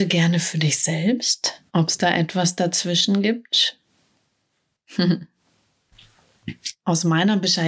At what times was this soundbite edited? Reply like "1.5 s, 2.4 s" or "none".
1.7 s